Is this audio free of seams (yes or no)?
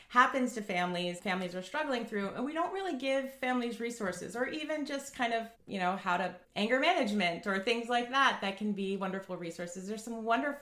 no